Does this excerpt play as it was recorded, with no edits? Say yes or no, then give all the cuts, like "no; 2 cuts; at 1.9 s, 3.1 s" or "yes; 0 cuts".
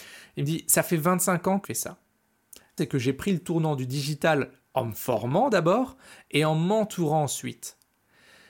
no; 2 cuts; at 1.6 s, 2.8 s